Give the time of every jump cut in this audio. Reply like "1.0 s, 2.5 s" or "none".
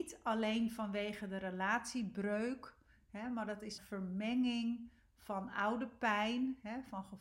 3.8 s